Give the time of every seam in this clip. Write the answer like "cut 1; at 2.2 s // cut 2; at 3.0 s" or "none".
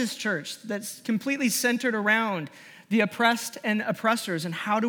none